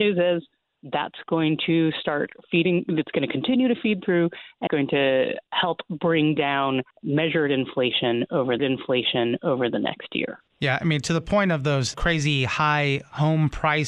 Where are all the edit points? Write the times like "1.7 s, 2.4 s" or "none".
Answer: 4.7 s, 6.9 s, 8.6 s, 10.5 s